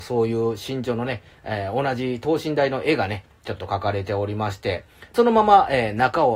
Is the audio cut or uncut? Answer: cut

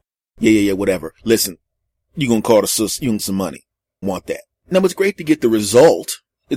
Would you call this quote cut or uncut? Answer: cut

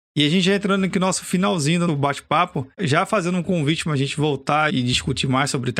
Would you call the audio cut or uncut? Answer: cut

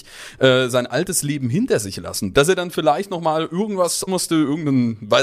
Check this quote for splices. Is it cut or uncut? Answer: cut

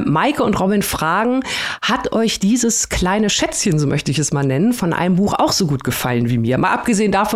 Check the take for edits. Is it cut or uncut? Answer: uncut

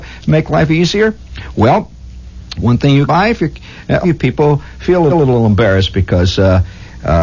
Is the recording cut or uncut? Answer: cut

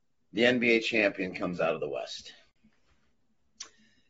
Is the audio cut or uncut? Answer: uncut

